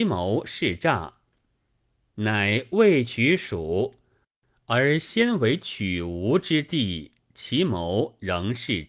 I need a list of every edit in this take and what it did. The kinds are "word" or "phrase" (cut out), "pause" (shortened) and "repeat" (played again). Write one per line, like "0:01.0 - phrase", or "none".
none

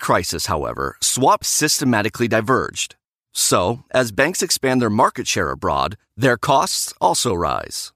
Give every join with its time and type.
0:01.4 - phrase

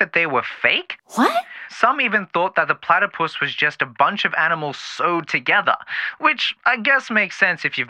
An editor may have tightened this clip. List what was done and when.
0:06.6 - pause

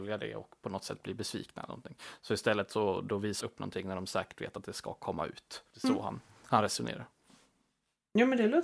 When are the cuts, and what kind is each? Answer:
0:03.4 - phrase
0:05.7 - pause

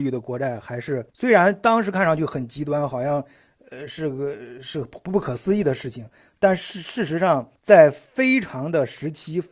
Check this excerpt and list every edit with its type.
0:01.1 - pause
0:07.6 - pause

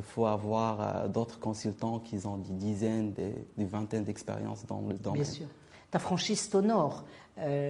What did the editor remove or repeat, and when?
none

